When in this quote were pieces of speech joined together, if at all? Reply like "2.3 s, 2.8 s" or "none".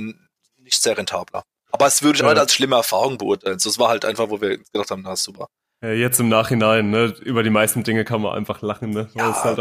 none